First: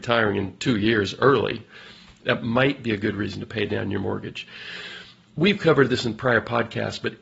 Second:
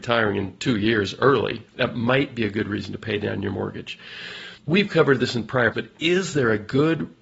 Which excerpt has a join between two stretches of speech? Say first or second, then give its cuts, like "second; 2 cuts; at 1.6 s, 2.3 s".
second; 3 cuts; at 1.7 s, 4.6 s, 5.7 s